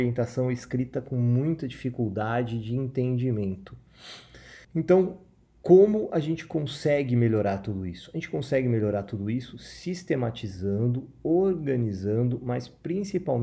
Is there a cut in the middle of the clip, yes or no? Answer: yes